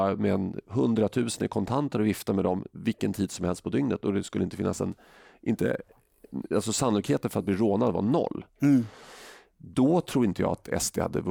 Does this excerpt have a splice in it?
no; 0 cuts

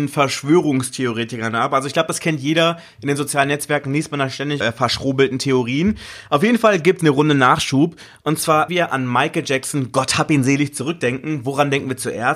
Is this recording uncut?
no; 3 cuts; at 4.6 s, 7.0 s, 8.7 s

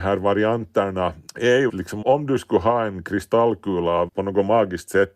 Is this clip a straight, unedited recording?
no; 4 cuts; at 1.3 s, 1.7 s, 2.0 s, 4.1 s

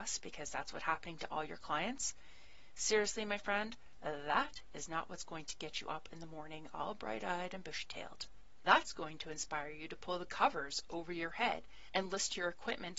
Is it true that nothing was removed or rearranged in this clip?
yes; 0 cuts

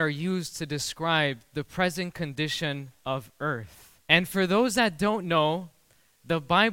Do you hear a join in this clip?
yes; 1 cut; at 4.0 s

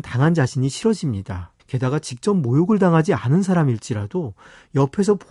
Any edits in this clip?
yes; 1 cut; at 1.6 s

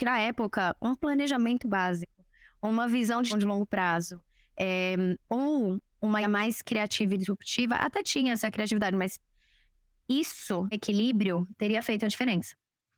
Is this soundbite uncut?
no; 3 cuts; at 3.3 s, 6.2 s, 10.7 s

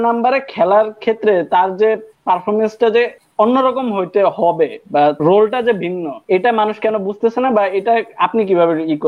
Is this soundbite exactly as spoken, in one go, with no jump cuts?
no; 3 cuts; at 3.2 s, 5.2 s, 6.2 s

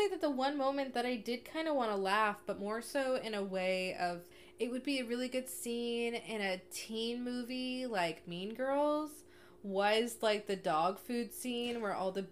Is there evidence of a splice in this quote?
no; 0 cuts

